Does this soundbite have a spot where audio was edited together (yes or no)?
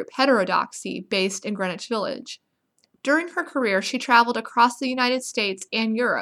no